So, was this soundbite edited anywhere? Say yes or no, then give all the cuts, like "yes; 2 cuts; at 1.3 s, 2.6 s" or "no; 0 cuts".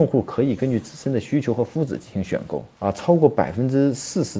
yes; 1 cut; at 2.7 s